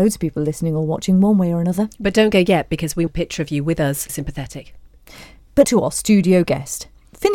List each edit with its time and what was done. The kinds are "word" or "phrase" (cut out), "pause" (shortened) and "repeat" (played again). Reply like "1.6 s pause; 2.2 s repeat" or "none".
3.1 s word; 4.1 s word; 5.6 s word